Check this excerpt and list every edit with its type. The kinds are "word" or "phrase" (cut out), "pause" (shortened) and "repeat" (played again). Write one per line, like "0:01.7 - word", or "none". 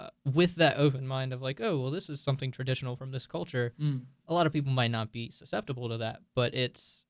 none